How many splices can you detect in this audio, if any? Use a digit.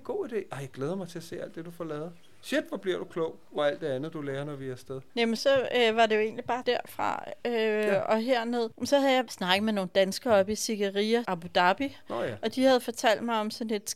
4